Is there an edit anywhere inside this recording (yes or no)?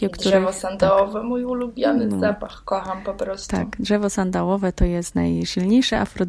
no